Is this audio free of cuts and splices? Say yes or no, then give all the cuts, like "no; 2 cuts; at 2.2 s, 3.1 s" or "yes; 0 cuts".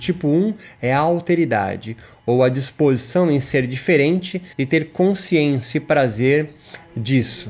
no; 1 cut; at 4.5 s